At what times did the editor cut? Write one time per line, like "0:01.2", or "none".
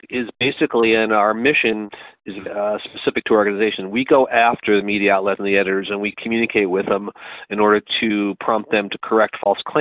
0:02.5
0:05.4